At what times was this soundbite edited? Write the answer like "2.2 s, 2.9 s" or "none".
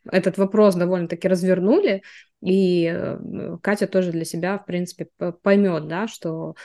none